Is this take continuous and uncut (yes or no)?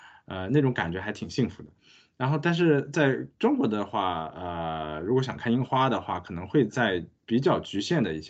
yes